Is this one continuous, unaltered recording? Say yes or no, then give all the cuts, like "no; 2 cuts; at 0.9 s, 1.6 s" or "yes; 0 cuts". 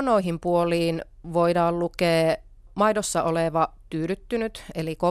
yes; 0 cuts